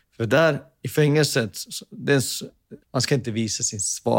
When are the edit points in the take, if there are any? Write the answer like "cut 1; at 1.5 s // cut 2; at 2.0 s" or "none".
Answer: cut 1; at 2.8 s